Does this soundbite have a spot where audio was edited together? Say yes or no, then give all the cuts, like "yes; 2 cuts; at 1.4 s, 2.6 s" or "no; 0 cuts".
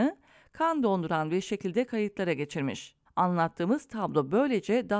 yes; 1 cut; at 3.1 s